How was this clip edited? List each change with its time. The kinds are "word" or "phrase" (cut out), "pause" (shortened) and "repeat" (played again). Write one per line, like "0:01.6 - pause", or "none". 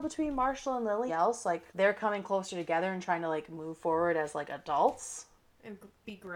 0:01.1 - phrase
0:01.7 - pause